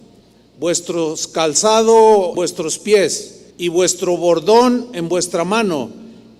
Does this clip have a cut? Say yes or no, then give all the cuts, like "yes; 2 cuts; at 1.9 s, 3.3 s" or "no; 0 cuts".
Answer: yes; 2 cuts; at 2.3 s, 3.5 s